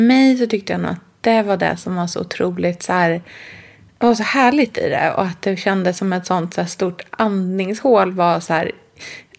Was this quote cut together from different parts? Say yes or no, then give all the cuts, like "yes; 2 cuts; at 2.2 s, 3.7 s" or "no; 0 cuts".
no; 0 cuts